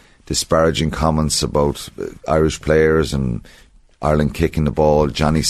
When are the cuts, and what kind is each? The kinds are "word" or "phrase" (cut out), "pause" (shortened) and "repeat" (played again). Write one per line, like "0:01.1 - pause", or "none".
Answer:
0:02.2 - pause